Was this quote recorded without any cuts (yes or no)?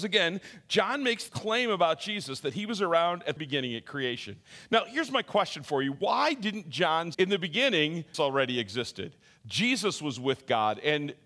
no